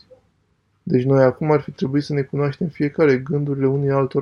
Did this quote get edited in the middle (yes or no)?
no